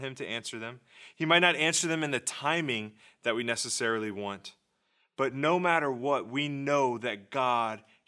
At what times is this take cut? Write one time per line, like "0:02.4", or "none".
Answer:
none